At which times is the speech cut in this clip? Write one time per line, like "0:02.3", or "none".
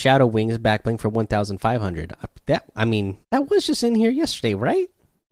0:03.2

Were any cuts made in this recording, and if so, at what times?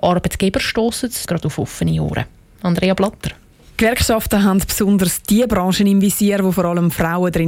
0:01.3

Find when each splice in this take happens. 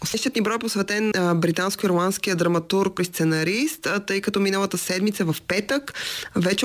0:01.1
0:03.0

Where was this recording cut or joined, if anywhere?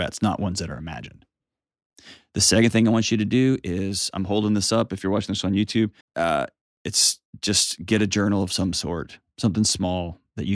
0:06.0

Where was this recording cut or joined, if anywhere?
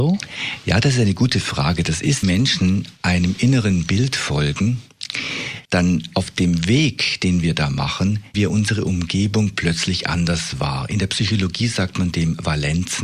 0:02.2
0:05.6
0:08.3

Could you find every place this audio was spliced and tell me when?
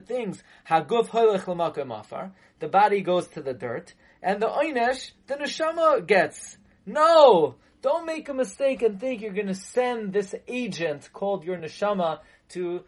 none

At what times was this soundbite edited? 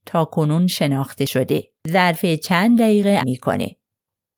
0:01.8
0:03.2

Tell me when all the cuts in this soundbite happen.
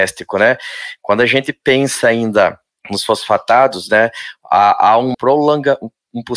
0:05.1

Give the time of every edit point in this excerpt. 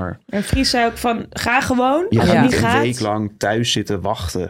none

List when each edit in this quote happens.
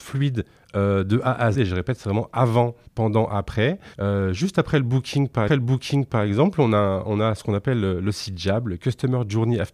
0:01.5
0:02.9
0:03.9
0:05.5

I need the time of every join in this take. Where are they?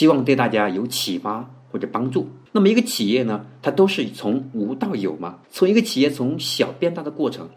0:02.5
0:05.4

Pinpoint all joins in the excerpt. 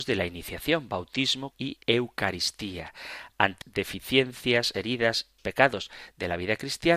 0:01.5
0:01.8
0:03.6
0:04.7
0:05.4

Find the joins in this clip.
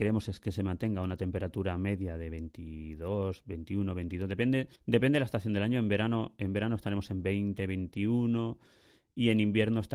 0:04.8

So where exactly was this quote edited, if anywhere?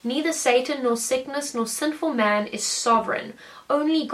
none

